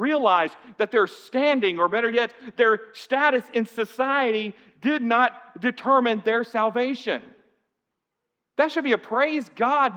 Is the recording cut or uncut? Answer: uncut